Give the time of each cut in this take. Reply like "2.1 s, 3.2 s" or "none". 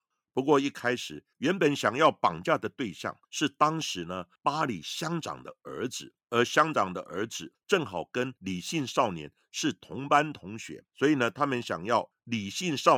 3.2 s, 6.2 s, 10.9 s